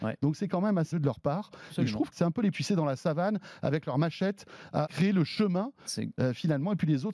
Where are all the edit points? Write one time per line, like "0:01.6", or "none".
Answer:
0:00.9
0:02.1
0:02.5
0:04.9